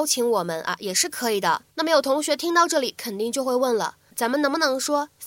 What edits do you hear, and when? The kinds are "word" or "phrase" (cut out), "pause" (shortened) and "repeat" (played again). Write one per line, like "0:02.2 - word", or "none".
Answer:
0:01.7 - pause
0:04.1 - phrase

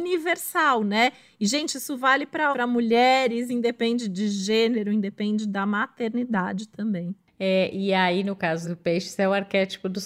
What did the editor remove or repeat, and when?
0:02.5 - word
0:03.5 - word
0:08.6 - word

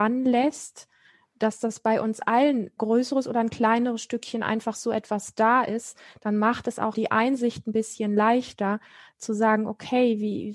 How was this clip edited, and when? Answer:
0:02.8 - word
0:06.9 - word

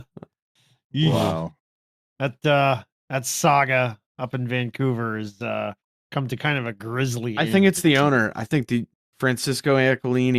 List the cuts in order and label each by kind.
0:08.9 - pause

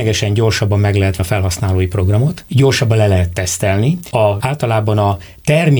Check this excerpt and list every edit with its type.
0:01.2 - word
0:04.4 - word

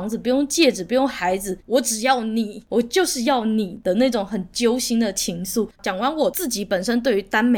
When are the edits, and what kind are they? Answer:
0:05.7 - pause

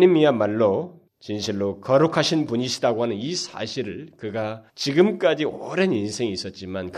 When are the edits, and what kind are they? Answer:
0:01.1 - pause
0:04.7 - pause

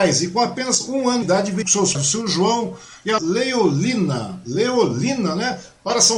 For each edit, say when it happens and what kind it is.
0:01.2 - word
0:01.6 - word
0:01.9 - word
0:03.2 - word

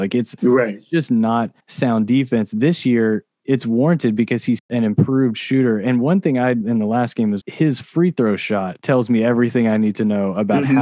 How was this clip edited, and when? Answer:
0:01.6 - pause
0:06.6 - phrase
0:07.4 - word

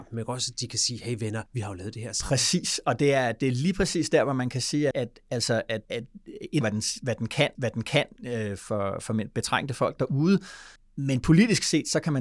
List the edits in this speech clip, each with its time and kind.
0:01.5 - pause
0:04.9 - word
0:05.8 - pause
0:06.6 - phrase
0:07.5 - repeat
0:10.8 - pause

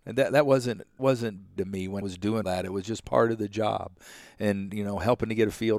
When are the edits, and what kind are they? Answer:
0:01.0 - word
0:01.6 - word
0:02.0 - word
0:02.4 - word
0:04.7 - word

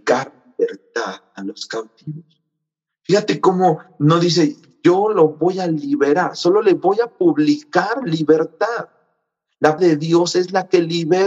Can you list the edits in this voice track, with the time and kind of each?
0:09.8 - word

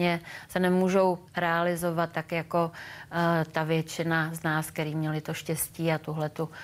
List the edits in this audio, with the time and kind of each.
0:01.3 - pause

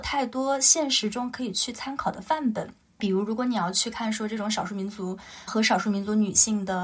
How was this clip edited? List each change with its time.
0:05.5 - word

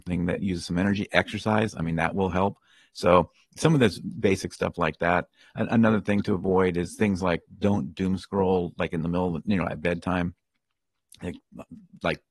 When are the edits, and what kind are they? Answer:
none

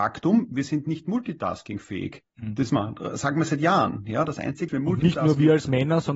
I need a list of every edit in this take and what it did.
0:02.3 - pause
0:02.7 - word
0:04.7 - word

